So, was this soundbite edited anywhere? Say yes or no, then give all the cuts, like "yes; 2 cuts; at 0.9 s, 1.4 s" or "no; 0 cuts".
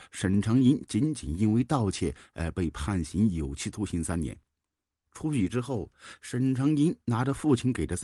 no; 0 cuts